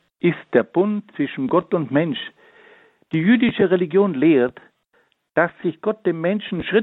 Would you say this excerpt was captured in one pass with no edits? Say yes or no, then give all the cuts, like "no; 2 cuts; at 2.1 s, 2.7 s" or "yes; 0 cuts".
yes; 0 cuts